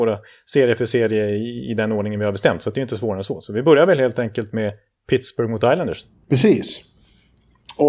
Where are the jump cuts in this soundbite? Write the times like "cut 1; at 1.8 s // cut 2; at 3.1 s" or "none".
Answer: none